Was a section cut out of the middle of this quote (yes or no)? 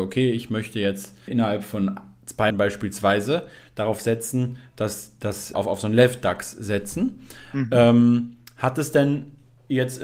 yes